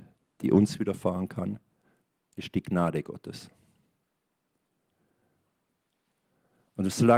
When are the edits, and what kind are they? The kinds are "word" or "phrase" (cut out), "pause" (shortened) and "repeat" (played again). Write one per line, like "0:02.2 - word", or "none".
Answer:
none

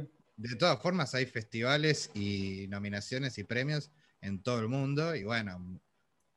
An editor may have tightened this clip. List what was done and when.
none

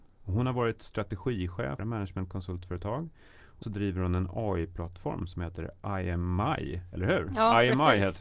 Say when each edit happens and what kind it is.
0:01.8 - phrase
0:03.6 - word

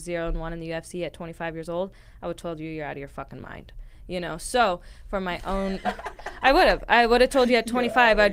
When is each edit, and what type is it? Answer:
none

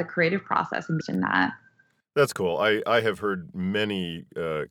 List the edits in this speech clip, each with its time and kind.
0:01.0 - word

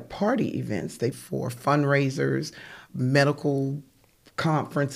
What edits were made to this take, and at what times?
0:01.1 - word
0:02.9 - word

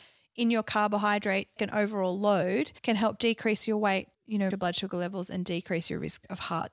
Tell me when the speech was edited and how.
0:01.6 - word
0:02.8 - pause
0:04.1 - pause
0:04.5 - word

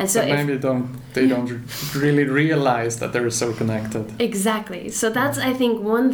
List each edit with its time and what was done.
none

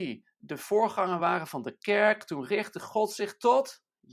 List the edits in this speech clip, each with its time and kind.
none

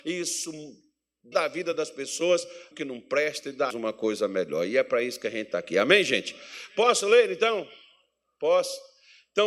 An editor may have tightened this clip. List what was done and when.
0:01.3 - word
0:02.7 - word
0:03.7 - phrase

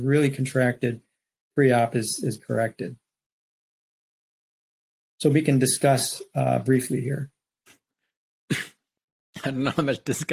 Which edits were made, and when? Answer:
0:02.4 - word

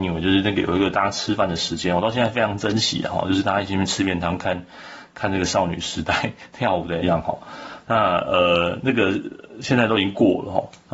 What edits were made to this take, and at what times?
0:07.0 - word

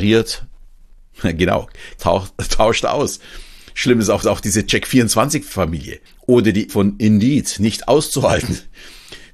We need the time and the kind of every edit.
0:02.0 - word
0:04.2 - repeat
0:06.1 - pause
0:06.7 - word

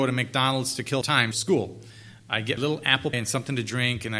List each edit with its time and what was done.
0:01.0 - word
0:01.3 - word
0:02.6 - word
0:03.1 - word

